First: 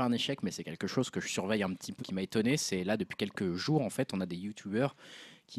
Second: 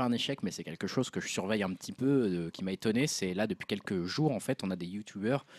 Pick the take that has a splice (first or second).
first